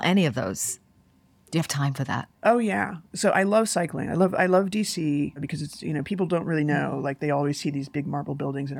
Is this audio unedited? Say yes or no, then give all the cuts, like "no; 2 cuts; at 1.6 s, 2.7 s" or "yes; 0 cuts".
no; 1 cut; at 2.4 s